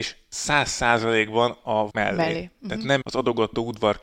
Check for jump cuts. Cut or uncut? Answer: cut